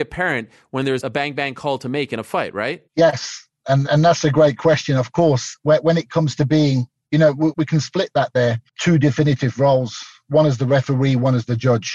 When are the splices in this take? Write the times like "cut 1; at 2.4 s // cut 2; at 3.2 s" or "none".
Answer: cut 1; at 1.0 s // cut 2; at 2.9 s // cut 3; at 3.9 s // cut 4; at 7.5 s // cut 5; at 8.7 s